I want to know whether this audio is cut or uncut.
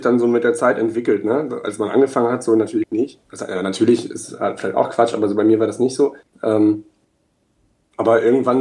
cut